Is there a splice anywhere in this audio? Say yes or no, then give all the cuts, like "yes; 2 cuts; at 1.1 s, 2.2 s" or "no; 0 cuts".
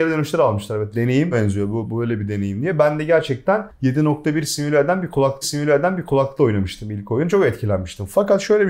yes; 3 cuts; at 1.3 s, 1.8 s, 5.4 s